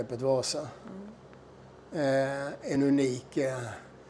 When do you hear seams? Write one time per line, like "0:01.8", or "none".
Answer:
none